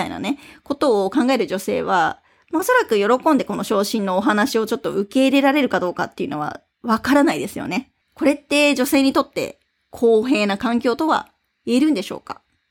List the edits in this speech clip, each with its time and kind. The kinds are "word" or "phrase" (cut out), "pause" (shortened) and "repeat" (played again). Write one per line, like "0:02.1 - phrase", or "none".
0:08.0 - pause